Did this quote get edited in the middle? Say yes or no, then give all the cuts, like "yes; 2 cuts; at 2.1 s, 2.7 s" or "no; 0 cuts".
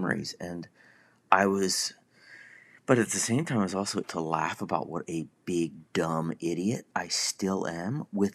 yes; 1 cut; at 4.0 s